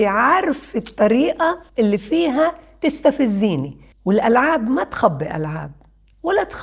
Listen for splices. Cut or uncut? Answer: cut